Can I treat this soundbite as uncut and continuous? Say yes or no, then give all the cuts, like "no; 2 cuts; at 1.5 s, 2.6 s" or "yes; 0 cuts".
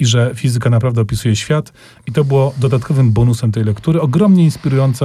yes; 0 cuts